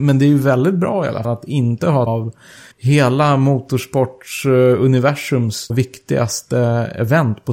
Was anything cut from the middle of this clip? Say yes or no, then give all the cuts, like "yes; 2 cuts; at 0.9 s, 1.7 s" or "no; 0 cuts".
yes; 4 cuts; at 1.2 s, 2.1 s, 2.7 s, 5.7 s